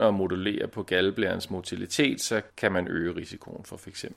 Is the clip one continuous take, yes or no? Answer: no